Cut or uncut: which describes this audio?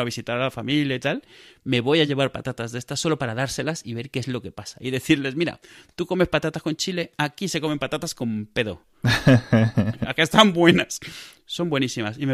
uncut